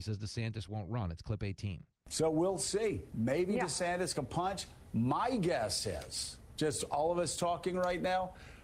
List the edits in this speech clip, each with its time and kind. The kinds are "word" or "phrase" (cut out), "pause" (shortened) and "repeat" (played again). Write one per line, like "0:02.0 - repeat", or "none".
0:04.1 - phrase